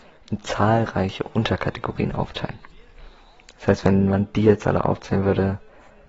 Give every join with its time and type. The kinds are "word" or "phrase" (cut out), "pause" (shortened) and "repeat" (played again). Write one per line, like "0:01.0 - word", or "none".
none